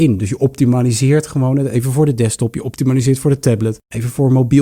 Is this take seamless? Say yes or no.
yes